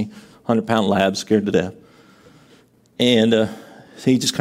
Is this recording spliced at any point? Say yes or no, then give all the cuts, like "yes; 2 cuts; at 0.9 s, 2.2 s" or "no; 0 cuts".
no; 0 cuts